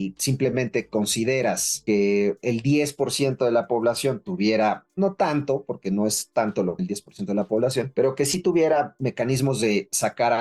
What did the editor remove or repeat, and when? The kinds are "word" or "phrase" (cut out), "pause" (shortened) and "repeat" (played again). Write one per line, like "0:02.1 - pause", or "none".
0:06.8 - word